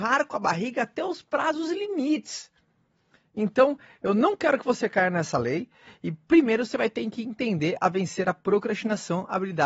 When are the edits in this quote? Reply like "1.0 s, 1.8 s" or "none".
none